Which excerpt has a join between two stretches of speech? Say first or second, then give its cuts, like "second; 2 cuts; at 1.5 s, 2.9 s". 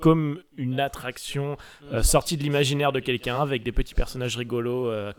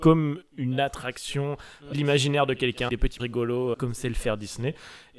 second; 4 cuts; at 1.9 s, 2.9 s, 3.2 s, 3.7 s